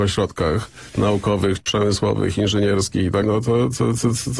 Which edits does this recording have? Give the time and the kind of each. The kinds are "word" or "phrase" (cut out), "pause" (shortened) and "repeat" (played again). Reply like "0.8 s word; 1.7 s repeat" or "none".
1.6 s word; 3.2 s word